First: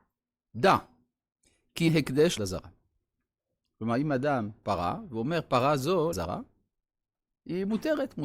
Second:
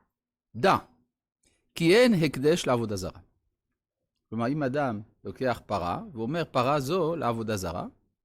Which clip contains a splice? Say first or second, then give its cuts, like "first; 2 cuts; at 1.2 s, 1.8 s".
first; 4 cuts; at 1.9 s, 2.4 s, 4.6 s, 6.1 s